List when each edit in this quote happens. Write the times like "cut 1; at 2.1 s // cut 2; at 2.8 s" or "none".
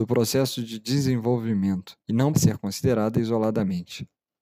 cut 1; at 2.0 s // cut 2; at 2.3 s